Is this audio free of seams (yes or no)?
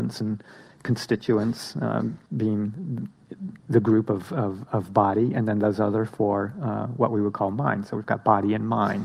no